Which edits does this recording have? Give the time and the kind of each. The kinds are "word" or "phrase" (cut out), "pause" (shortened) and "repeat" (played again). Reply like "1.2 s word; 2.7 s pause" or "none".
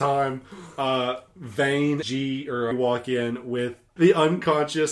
2.0 s word; 2.7 s phrase; 4.0 s word